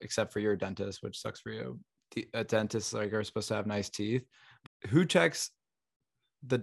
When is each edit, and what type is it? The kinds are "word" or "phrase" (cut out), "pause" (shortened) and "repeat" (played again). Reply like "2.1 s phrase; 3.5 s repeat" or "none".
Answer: 4.7 s word